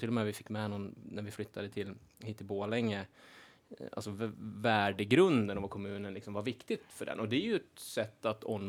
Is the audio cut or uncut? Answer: uncut